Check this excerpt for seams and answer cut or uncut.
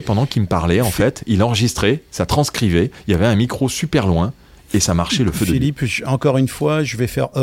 uncut